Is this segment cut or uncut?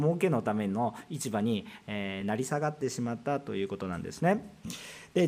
uncut